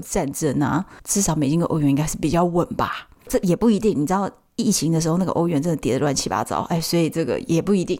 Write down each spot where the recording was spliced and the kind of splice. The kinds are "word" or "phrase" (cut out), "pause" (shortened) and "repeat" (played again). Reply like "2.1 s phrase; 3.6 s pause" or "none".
1.0 s pause